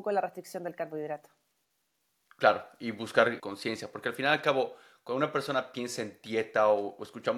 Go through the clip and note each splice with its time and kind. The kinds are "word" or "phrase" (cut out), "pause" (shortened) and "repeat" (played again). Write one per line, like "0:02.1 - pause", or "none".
0:03.4 - word